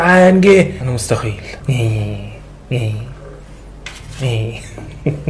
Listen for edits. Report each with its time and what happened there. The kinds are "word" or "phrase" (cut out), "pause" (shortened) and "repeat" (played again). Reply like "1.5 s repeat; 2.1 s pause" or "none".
1.6 s word

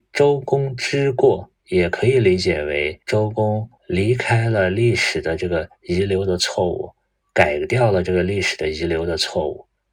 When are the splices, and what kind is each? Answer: 1.6 s pause; 3.0 s pause; 3.8 s pause; 7.2 s pause

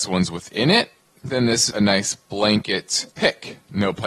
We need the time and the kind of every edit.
1.0 s pause; 1.7 s word; 3.1 s pause

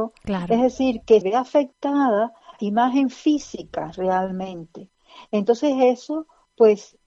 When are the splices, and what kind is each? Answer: 1.2 s word; 2.6 s word

